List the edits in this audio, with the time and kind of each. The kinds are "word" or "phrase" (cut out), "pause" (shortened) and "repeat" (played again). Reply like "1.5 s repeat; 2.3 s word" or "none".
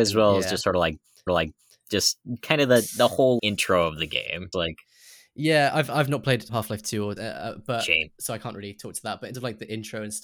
1.3 s repeat; 3.4 s word; 4.5 s word; 6.5 s word; 7.2 s phrase; 9.3 s word